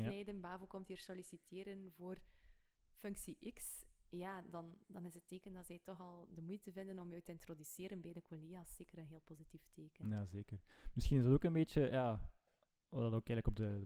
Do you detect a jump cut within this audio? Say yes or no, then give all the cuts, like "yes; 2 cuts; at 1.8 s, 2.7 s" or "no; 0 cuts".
no; 0 cuts